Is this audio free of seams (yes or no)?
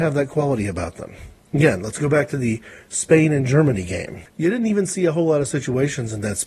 yes